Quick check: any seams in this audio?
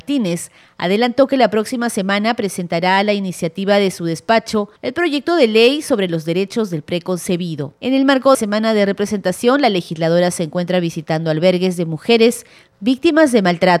yes; 3 cuts; at 4.8 s, 7.8 s, 8.3 s

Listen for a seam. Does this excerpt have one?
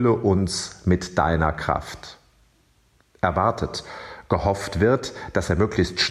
no; 0 cuts

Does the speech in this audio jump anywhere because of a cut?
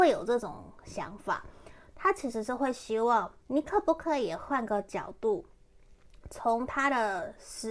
yes; 1 cut; at 3.4 s

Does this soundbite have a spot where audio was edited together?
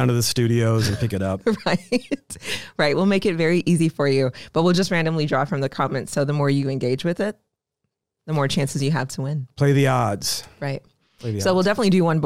no; 0 cuts

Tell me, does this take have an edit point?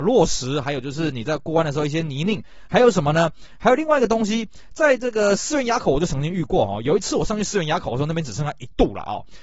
no; 0 cuts

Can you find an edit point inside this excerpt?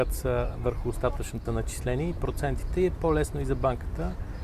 yes; 1 cut; at 1.5 s

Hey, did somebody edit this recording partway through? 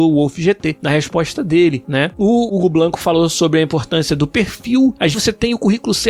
yes; 1 cut; at 5.1 s

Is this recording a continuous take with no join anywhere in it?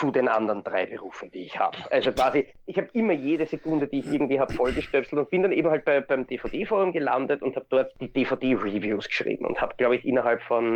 yes; 0 cuts

